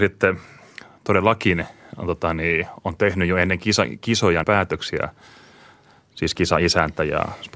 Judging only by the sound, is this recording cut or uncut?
cut